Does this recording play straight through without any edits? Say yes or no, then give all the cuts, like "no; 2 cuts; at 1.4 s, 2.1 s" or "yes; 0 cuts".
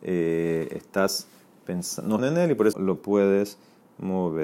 no; 2 cuts; at 2.2 s, 2.7 s